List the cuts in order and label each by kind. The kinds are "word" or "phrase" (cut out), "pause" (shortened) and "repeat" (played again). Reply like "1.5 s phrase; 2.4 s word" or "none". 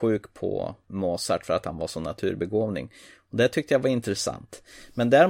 none